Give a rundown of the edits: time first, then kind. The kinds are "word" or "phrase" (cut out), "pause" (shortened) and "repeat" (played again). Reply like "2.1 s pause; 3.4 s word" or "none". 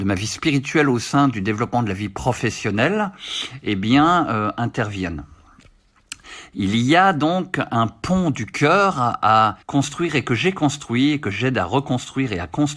9.6 s pause